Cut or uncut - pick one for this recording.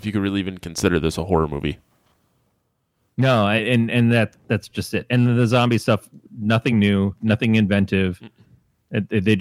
uncut